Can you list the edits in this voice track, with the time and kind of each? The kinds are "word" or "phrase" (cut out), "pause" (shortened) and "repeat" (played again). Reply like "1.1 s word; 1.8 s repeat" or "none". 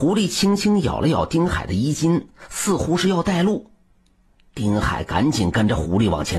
none

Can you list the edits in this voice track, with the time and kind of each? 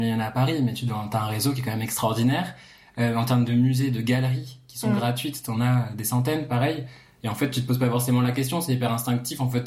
none

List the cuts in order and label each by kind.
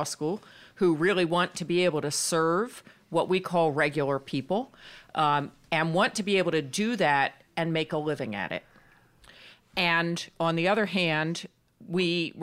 none

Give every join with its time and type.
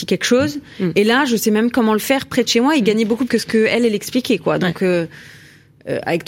3.3 s word

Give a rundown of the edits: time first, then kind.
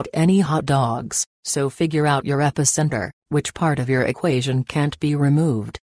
1.3 s pause; 3.2 s pause

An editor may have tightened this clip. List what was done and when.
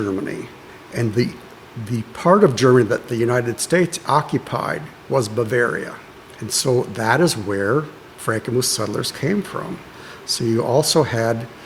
8.1 s pause

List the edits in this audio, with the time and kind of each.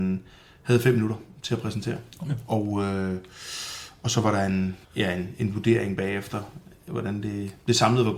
2.1 s pause; 4.8 s pause

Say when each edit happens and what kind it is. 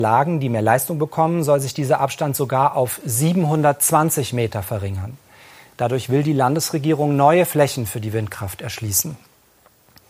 none

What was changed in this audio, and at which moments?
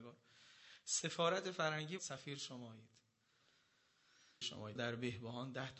2.0 s word; 4.4 s word; 4.8 s word

